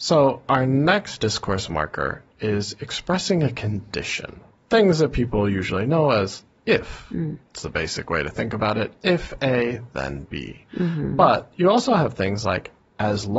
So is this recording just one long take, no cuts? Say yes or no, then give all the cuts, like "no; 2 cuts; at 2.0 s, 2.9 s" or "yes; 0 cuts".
yes; 0 cuts